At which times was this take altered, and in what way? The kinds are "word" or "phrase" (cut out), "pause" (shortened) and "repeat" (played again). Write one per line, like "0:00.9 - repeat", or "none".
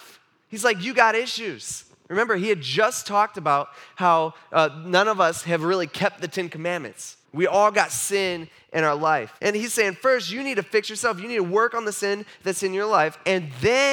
0:07.2 - pause
0:09.4 - pause